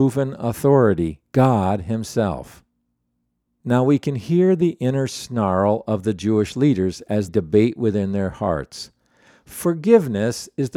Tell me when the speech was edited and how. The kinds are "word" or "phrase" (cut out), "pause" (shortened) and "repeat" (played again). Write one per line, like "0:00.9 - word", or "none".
0:07.3 - word